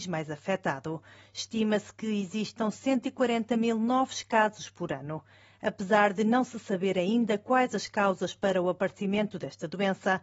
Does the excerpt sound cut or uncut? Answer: uncut